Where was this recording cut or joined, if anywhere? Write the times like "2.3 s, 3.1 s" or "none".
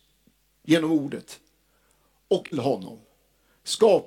2.5 s